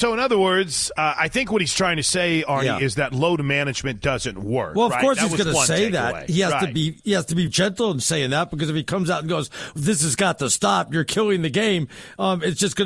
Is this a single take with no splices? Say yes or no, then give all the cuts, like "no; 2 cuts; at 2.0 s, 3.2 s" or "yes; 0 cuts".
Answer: no; 1 cut; at 7.5 s